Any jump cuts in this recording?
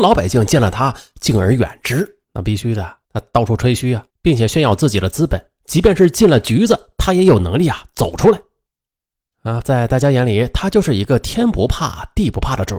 yes; 4 cuts; at 2.2 s, 3.0 s, 4.1 s, 9.6 s

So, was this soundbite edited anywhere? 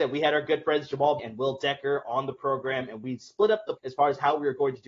yes; 2 cuts; at 1.2 s, 3.8 s

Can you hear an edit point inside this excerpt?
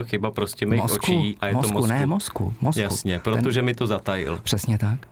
no; 0 cuts

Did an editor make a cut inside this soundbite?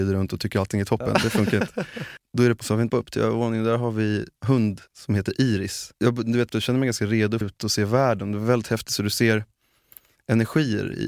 yes; 8 cuts; at 2.2 s, 2.6 s, 2.9 s, 4.4 s, 4.9 s, 6.0 s, 6.5 s, 7.4 s

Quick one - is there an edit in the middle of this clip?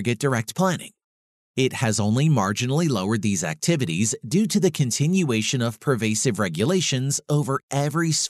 no; 0 cuts

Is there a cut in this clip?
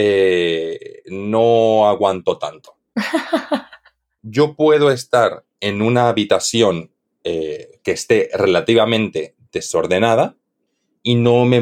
no; 0 cuts

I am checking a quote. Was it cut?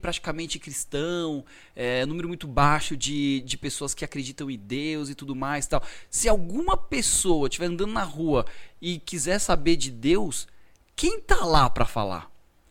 no; 0 cuts

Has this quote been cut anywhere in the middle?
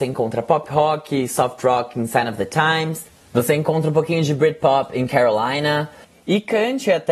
no; 0 cuts

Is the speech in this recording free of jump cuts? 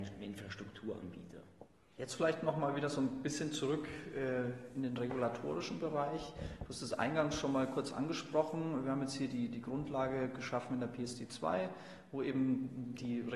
yes; 0 cuts

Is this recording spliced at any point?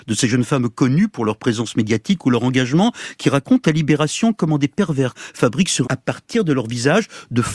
yes; 2 cuts; at 5.1 s, 5.8 s

